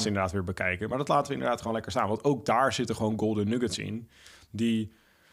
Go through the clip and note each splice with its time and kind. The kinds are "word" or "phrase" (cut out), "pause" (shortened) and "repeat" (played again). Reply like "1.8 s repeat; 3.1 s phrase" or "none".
none